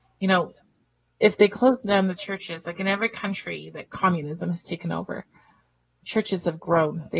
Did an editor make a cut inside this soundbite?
no; 0 cuts

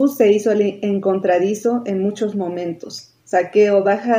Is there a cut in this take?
yes; 1 cut; at 3.2 s

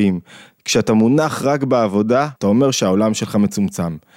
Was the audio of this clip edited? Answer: yes; 1 cut; at 2.4 s

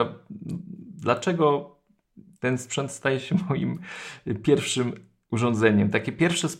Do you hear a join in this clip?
no; 0 cuts

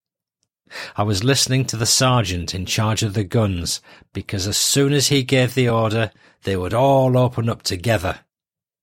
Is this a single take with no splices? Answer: yes; 0 cuts

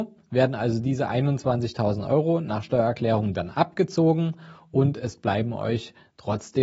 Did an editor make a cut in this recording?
no; 0 cuts

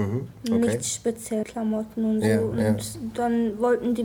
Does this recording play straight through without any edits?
no; 1 cut; at 1.4 s

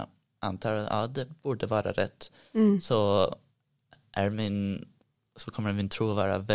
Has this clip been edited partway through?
no; 0 cuts

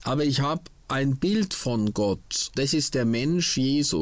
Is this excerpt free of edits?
no; 1 cut; at 2.6 s

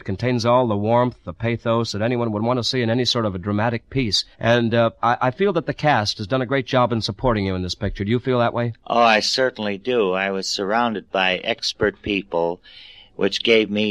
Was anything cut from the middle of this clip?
yes; 1 cut; at 4.3 s

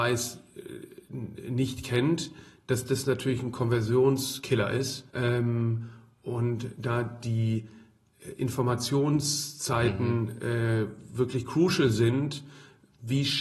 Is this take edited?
yes; 1 cut; at 5.1 s

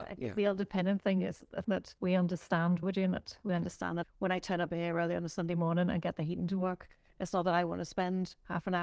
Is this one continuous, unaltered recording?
no; 4 cuts; at 1.6 s, 2.0 s, 2.8 s, 4.0 s

